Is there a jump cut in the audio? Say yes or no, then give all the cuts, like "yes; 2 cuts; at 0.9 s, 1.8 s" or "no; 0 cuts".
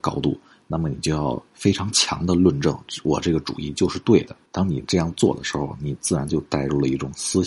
yes; 2 cuts; at 1.5 s, 4.5 s